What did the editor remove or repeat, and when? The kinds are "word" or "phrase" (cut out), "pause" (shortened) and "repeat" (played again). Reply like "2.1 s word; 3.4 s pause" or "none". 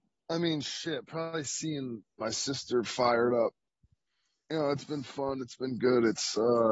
2.2 s word